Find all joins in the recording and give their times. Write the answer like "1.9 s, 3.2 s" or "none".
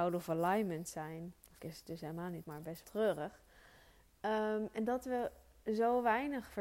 1.6 s, 2.4 s, 2.8 s